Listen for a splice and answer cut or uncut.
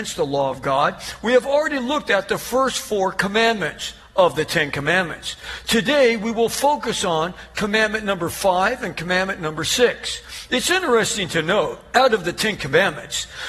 uncut